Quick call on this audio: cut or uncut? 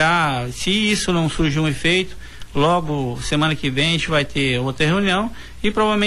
uncut